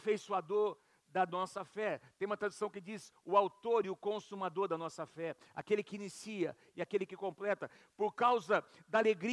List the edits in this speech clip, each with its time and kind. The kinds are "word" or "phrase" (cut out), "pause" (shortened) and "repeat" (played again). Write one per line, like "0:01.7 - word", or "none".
none